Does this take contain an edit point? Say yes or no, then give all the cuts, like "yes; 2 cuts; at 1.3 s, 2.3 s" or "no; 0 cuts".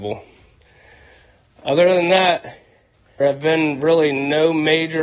yes; 1 cut; at 3.2 s